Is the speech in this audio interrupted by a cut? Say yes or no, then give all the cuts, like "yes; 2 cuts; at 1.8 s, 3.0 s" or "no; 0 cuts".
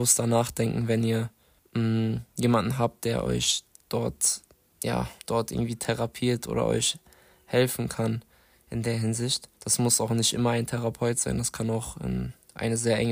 yes; 3 cuts; at 1.6 s, 5.2 s, 9.6 s